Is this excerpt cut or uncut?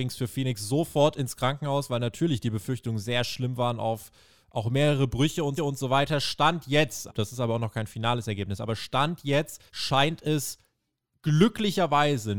cut